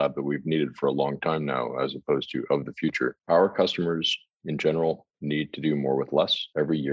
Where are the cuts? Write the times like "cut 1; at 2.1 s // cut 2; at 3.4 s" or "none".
cut 1; at 3.2 s // cut 2; at 5.1 s